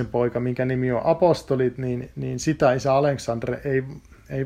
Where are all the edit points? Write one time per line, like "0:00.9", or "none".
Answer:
none